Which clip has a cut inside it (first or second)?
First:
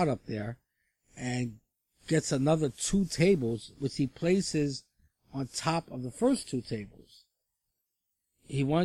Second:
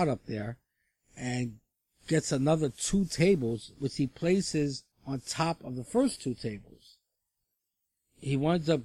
second